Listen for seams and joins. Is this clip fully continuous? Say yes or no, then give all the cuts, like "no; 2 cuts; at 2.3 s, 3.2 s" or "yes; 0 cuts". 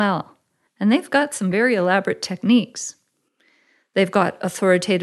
yes; 0 cuts